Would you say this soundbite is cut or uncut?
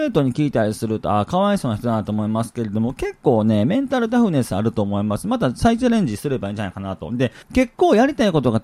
cut